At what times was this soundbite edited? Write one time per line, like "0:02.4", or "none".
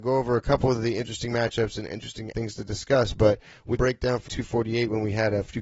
0:02.3
0:03.7
0:04.3

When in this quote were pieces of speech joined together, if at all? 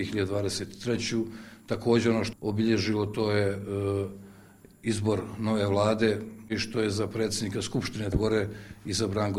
0:02.3
0:08.1

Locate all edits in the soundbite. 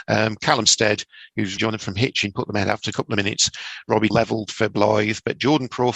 0:01.6
0:02.9
0:04.1

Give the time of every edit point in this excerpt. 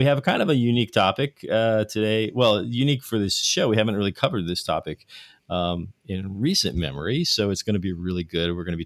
none

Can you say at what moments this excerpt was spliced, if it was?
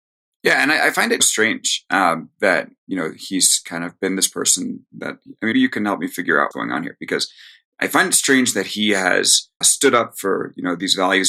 0:01.2
0:05.5
0:06.5
0:09.6

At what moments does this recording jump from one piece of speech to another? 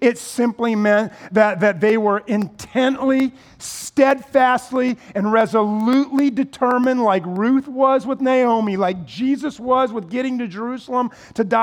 none

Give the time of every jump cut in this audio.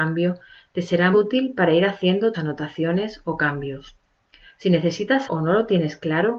0:01.1
0:02.3
0:05.3

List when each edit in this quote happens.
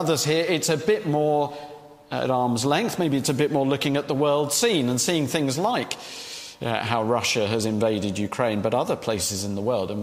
0:02.0

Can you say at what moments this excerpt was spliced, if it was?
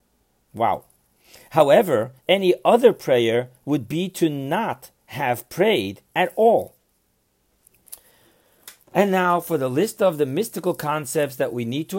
0:02.2
0:05.0
0:06.0
0:08.8

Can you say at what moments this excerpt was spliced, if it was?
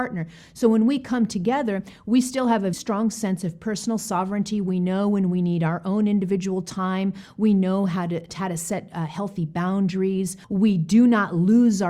0:02.7
0:10.4

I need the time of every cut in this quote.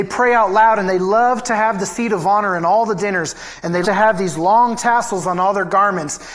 0:03.8

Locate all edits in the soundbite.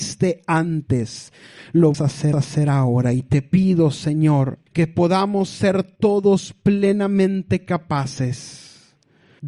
0:01.9
0:02.3
0:04.7

